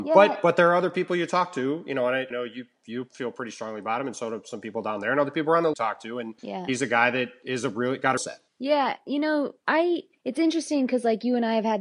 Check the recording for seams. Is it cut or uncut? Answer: cut